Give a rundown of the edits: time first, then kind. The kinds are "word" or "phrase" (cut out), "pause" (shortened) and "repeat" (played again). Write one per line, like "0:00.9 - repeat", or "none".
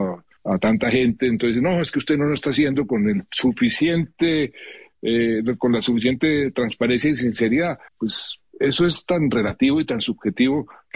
0:07.9 - pause